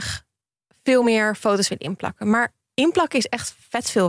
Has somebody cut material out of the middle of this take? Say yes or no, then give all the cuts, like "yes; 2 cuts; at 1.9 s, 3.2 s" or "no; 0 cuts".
no; 0 cuts